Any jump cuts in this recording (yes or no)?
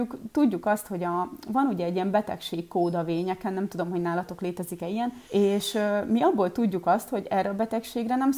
yes